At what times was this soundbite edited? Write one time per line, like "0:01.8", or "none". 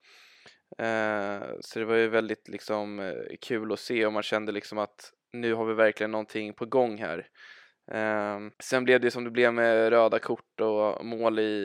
0:08.5